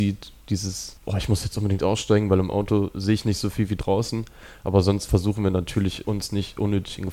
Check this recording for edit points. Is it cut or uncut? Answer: uncut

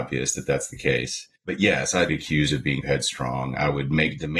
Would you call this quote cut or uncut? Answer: cut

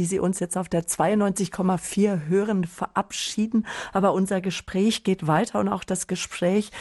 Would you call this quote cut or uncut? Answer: uncut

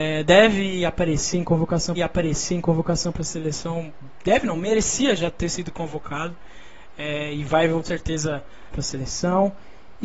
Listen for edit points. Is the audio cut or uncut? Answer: cut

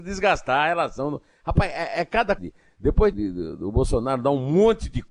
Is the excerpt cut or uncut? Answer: cut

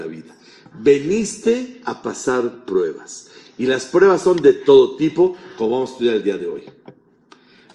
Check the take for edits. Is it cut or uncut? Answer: uncut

